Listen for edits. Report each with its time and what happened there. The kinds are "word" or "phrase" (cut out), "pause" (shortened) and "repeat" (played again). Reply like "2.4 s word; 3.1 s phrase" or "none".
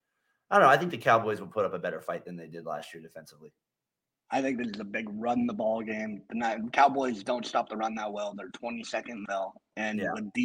8.5 s word; 9.3 s word